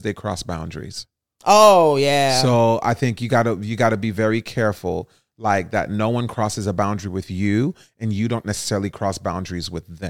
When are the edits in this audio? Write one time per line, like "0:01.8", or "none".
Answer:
none